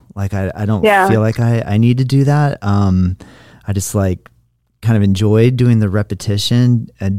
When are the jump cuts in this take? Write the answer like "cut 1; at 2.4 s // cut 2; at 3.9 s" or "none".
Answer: none